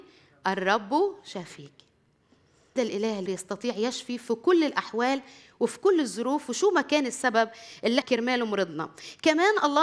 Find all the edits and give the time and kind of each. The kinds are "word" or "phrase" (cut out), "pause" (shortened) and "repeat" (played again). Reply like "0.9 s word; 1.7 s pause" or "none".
2.8 s word; 3.3 s word; 8.0 s word